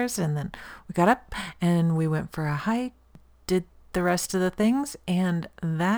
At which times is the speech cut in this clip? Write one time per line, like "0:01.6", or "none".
none